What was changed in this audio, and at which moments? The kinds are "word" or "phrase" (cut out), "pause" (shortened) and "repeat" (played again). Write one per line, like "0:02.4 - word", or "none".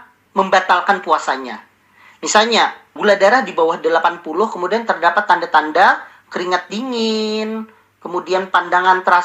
none